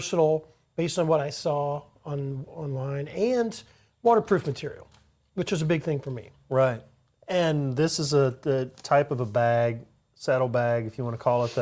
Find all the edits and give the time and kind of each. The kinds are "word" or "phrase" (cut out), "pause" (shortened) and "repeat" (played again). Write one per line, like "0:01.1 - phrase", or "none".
none